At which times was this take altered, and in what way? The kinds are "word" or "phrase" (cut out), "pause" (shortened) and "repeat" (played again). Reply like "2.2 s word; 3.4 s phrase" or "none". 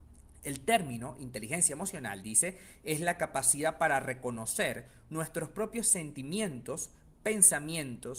none